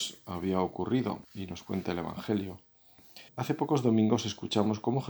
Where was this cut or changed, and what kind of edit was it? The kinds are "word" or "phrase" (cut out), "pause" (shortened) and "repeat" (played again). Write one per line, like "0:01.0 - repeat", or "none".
0:01.2 - pause
0:03.3 - pause